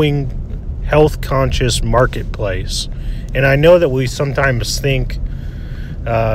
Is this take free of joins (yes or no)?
yes